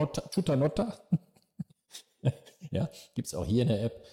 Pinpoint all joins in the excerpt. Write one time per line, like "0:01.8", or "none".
0:01.7